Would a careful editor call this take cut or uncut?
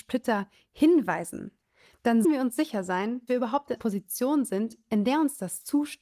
cut